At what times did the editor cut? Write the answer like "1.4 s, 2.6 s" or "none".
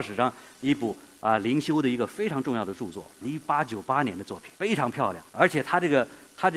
3.2 s, 4.6 s, 5.3 s